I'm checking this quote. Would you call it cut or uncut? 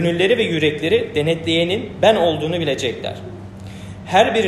uncut